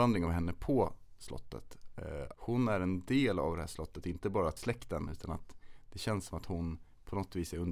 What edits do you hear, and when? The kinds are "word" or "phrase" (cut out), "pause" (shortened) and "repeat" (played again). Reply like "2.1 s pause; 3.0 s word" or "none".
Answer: 2.3 s word; 4.6 s phrase